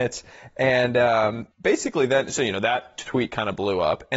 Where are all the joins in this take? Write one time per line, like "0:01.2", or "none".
0:01.5